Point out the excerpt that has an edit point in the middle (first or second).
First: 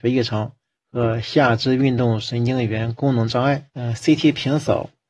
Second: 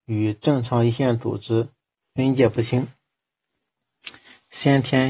first